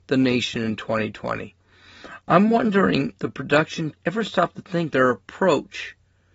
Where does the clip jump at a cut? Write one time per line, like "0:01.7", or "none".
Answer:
0:03.2
0:03.9
0:04.9